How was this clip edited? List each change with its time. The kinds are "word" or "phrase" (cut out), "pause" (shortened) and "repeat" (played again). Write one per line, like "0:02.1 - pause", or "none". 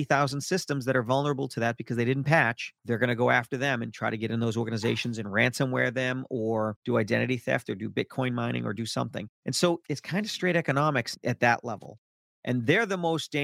0:02.8 - pause
0:09.3 - pause